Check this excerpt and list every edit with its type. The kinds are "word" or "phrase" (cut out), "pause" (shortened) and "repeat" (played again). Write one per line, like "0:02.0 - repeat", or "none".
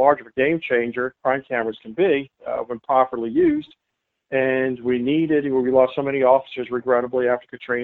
none